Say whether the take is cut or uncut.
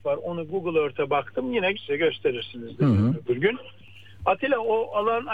cut